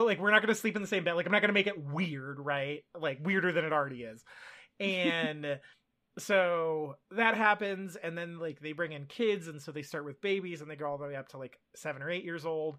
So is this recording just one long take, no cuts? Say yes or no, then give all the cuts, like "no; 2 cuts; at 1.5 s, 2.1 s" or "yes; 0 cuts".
no; 2 cuts; at 5.7 s, 7.0 s